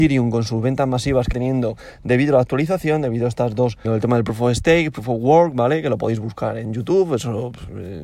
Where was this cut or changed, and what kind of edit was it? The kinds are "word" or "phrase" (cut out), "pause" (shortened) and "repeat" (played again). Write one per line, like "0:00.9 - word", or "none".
0:01.3 - word
0:03.8 - word